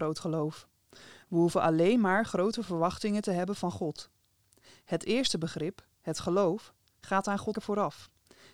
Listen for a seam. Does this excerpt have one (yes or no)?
yes